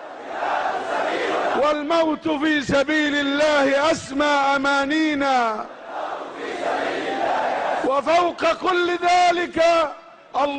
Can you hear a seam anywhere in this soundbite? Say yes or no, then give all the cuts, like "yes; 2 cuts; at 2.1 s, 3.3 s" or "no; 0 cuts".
no; 0 cuts